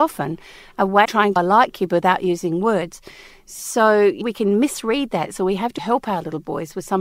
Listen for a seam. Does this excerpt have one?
yes; 4 cuts; at 1.0 s, 1.4 s, 4.2 s, 5.8 s

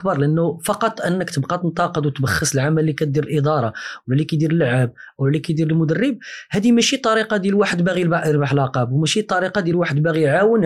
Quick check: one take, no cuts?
yes; 0 cuts

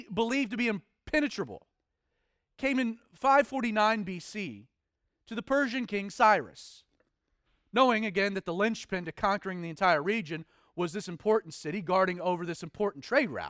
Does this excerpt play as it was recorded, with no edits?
yes; 0 cuts

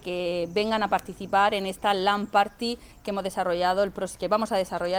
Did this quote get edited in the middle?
no; 0 cuts

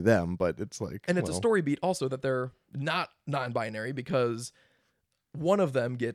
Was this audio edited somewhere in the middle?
no; 0 cuts

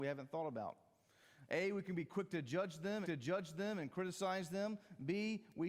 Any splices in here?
yes; 1 cut; at 3.0 s

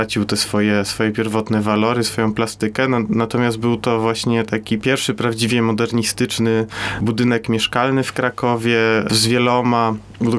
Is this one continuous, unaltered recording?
yes; 0 cuts

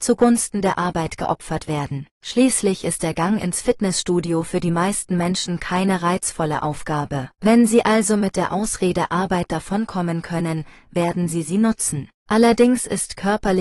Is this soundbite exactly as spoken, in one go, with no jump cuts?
no; 3 cuts; at 2.1 s, 7.3 s, 12.2 s

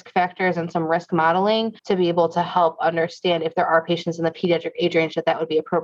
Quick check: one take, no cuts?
no; 1 cut; at 1.8 s

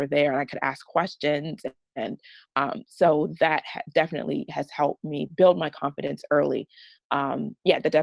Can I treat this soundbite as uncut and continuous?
yes; 0 cuts

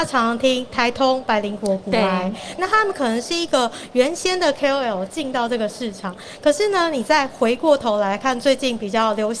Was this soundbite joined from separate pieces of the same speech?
yes; 1 cut; at 2.6 s

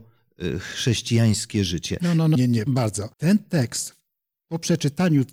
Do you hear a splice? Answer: yes; 3 cuts; at 2.4 s, 2.7 s, 3.1 s

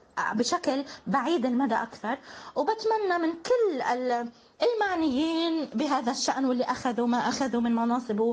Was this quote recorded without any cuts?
yes; 0 cuts

